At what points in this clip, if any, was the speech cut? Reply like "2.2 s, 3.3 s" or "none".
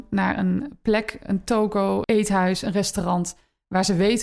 2.0 s